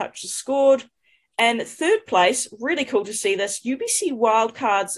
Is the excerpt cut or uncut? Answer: uncut